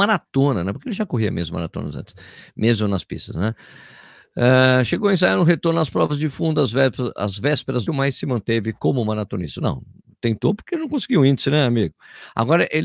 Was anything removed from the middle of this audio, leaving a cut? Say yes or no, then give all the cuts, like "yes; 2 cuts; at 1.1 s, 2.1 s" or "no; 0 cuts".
yes; 1 cut; at 7.9 s